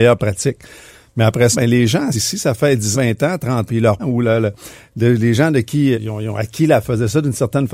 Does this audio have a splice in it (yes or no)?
yes